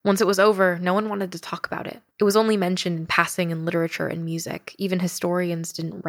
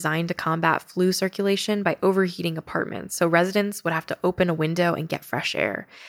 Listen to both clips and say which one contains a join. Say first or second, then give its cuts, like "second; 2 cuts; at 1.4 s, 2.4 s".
first; 1 cut; at 2.1 s